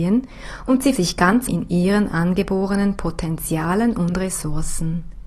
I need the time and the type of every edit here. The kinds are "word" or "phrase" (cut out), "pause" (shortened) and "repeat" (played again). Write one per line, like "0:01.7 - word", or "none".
0:00.9 - word
0:01.5 - word